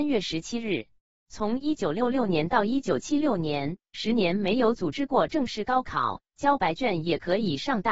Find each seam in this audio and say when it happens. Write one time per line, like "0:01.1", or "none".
0:01.0